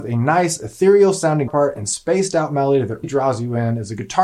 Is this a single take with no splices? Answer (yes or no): no